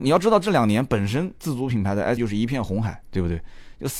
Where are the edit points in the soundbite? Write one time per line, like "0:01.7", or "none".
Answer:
0:01.4
0:02.2